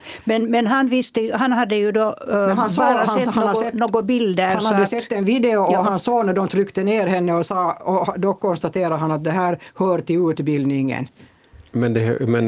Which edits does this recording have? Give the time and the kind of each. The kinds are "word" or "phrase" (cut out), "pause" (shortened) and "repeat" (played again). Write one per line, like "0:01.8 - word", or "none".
none

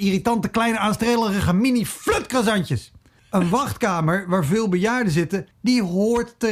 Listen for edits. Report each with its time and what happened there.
0:03.2 - pause
0:05.5 - pause

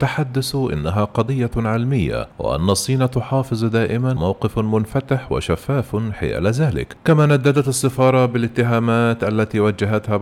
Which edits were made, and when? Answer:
0:02.3 - pause
0:04.2 - word
0:07.0 - pause

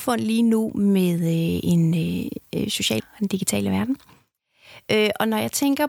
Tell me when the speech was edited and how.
0:03.0 - word

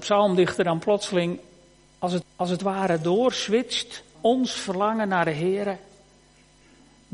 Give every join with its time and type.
0:02.2 - repeat
0:04.1 - word

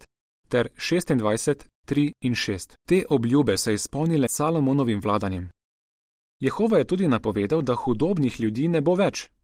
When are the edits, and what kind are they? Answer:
0:02.8 - pause
0:03.6 - word
0:04.3 - word

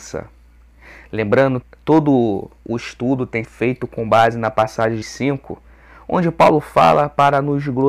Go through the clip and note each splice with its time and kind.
0:01.6 - word
0:03.4 - word
0:05.0 - word

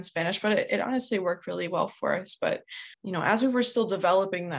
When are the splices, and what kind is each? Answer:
0:02.9 - pause

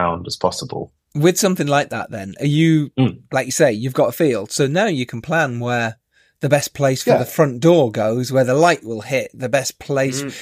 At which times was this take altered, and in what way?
none

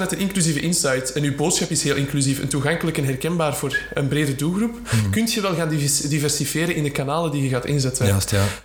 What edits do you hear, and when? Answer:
none

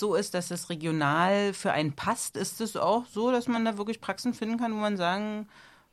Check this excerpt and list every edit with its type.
none

